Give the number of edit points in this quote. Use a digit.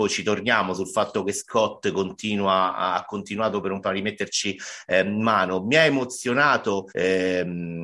2